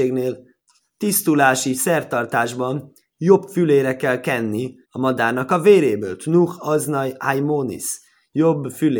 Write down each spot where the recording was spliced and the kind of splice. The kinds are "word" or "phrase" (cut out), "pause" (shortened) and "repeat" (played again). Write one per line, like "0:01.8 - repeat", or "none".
0:04.8 - pause